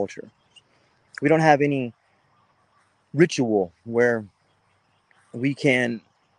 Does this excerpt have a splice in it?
no; 0 cuts

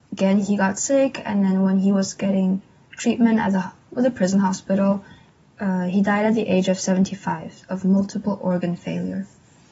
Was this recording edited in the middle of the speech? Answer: no; 0 cuts

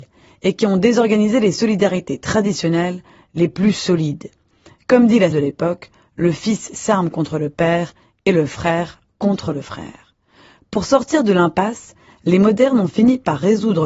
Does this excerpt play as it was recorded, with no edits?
no; 1 cut; at 5.3 s

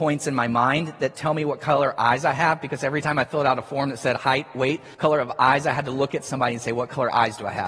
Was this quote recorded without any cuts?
no; 1 cut; at 4.9 s

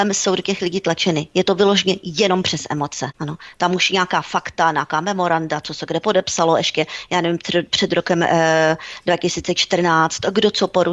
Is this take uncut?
yes; 0 cuts

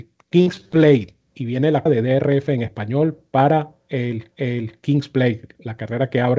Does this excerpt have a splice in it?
yes; 2 cuts; at 1.9 s, 4.3 s

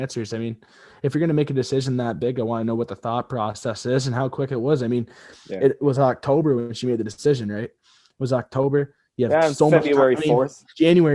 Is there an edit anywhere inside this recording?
no; 0 cuts

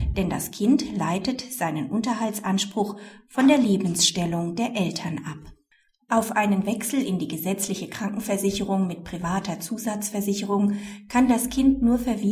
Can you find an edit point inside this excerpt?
no; 0 cuts

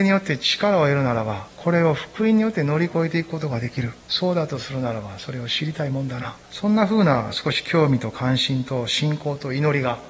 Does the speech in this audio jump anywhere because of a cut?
yes; 3 cuts; at 1.5 s, 4.0 s, 6.4 s

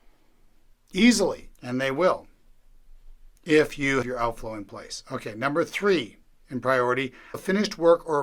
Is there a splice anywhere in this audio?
yes; 5 cuts; at 1.5 s, 3.4 s, 4.0 s, 6.2 s, 7.3 s

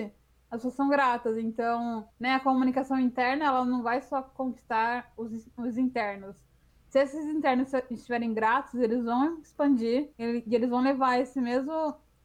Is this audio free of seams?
no; 2 cuts; at 2.1 s, 10.1 s

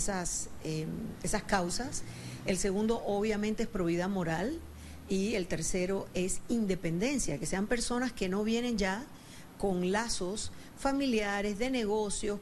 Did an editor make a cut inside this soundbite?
no; 0 cuts

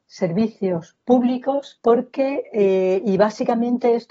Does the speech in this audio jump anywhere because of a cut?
no; 0 cuts

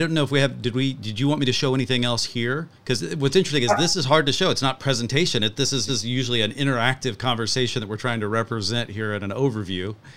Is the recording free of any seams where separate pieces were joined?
no; 2 cuts; at 2.8 s, 5.9 s

